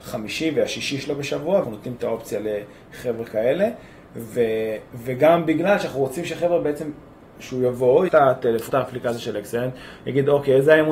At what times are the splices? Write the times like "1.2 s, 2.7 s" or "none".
1.6 s, 8.1 s, 8.7 s